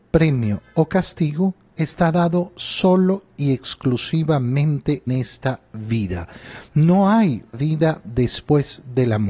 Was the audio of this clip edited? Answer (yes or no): yes